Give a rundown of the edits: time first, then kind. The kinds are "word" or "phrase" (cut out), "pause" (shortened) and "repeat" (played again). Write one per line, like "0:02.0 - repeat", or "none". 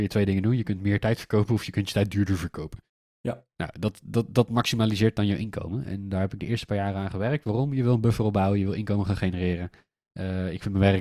none